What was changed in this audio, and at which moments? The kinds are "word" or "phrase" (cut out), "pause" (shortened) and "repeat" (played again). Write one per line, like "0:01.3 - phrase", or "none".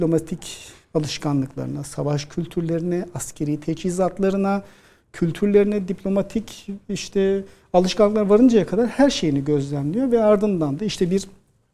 none